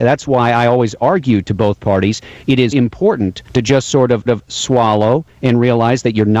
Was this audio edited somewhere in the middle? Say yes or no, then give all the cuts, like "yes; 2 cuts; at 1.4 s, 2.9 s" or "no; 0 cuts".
yes; 3 cuts; at 2.7 s, 3.5 s, 4.3 s